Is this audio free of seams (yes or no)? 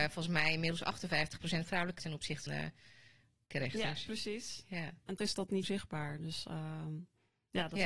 no